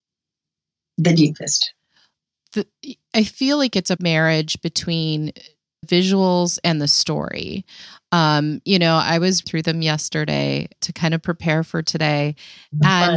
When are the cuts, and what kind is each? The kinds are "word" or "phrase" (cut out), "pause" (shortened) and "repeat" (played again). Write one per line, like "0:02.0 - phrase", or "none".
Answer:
0:04.0 - word
0:05.8 - word
0:09.4 - word
0:10.8 - word